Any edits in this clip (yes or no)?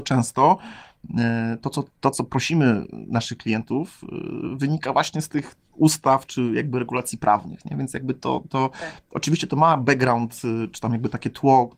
yes